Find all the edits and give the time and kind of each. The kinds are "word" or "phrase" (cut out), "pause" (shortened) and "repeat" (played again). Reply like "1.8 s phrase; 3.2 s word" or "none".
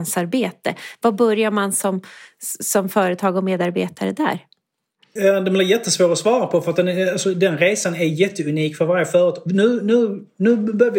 none